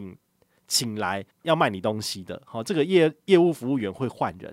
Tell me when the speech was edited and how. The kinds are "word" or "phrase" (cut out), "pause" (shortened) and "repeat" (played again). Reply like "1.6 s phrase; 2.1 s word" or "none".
1.3 s pause